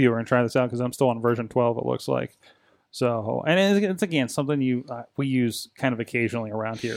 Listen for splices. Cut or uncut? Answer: uncut